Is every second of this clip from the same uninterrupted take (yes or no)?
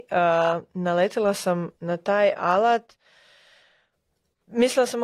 no